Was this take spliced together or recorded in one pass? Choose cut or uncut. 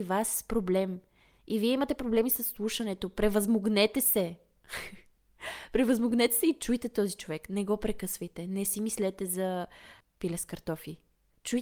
uncut